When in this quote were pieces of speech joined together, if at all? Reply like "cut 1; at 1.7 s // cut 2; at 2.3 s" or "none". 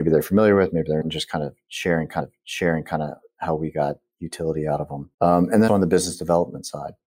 cut 1; at 1.0 s // cut 2; at 2.2 s // cut 3; at 5.1 s // cut 4; at 5.7 s